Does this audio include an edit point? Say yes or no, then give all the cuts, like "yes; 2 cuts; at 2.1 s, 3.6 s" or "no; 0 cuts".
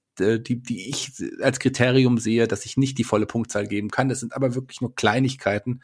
no; 0 cuts